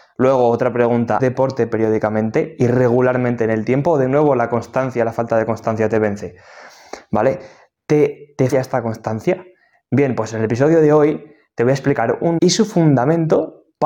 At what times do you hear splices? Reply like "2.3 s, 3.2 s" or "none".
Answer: 1.2 s, 8.5 s, 12.4 s